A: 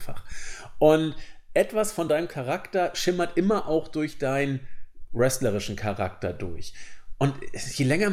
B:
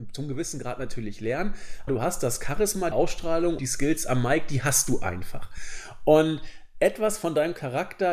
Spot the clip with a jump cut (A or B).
B